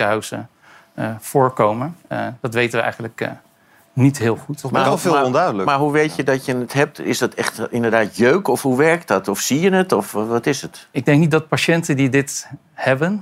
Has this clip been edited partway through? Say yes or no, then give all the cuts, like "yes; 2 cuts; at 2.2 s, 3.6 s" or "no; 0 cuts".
no; 0 cuts